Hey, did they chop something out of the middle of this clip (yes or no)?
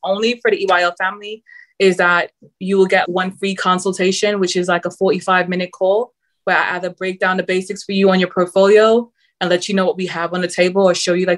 yes